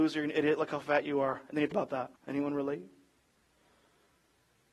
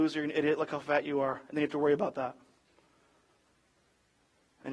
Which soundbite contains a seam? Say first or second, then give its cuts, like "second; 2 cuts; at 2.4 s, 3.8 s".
first; 2 cuts; at 1.7 s, 2.2 s